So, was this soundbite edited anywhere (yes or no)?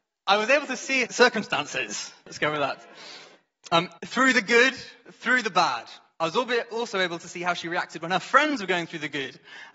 yes